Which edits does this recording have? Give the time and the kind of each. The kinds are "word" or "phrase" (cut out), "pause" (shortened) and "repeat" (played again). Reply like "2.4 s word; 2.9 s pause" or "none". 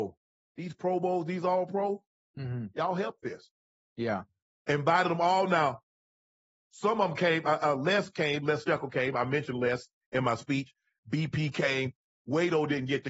none